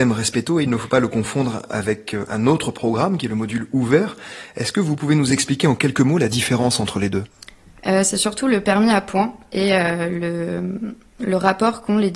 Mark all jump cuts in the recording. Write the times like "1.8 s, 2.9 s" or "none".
none

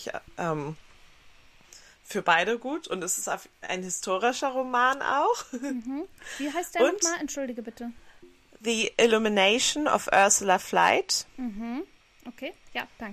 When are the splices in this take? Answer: none

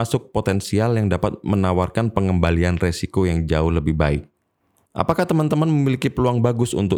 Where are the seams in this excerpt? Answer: none

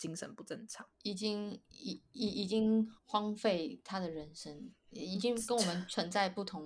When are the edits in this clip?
3.0 s

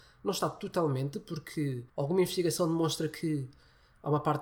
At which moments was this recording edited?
1.9 s

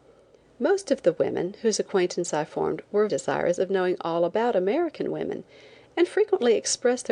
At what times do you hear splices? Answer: 3.1 s

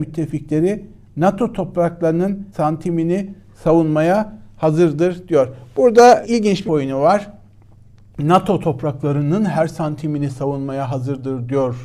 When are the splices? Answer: 2.5 s, 6.2 s, 6.7 s

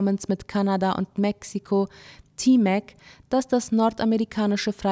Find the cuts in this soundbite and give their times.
none

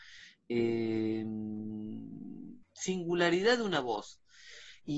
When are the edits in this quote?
2.6 s

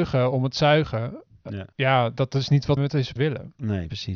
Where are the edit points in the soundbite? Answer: 1.7 s, 2.8 s, 3.2 s

